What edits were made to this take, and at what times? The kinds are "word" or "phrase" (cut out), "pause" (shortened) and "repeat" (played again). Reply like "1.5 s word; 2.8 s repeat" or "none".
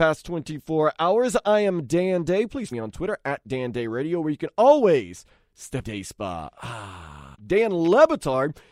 2.7 s word; 5.8 s phrase; 7.3 s pause